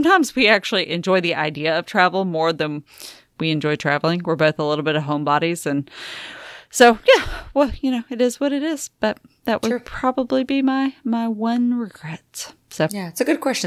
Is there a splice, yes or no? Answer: no